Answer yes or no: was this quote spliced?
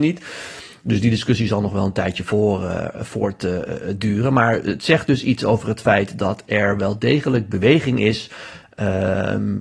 no